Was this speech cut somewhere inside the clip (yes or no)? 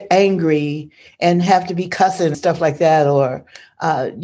yes